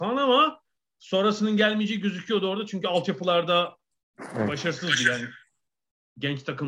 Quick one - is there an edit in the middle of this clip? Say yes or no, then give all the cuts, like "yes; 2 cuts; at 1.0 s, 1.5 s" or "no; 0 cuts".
no; 0 cuts